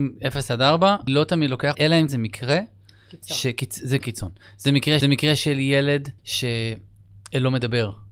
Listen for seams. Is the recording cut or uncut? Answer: cut